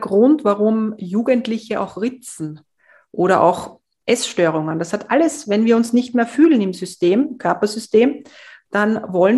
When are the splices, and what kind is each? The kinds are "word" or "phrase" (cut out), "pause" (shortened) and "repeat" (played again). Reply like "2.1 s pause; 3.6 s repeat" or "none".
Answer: none